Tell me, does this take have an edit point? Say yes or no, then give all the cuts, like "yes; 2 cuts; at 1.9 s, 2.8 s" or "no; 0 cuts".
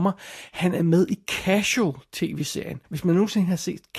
yes; 1 cut; at 2.8 s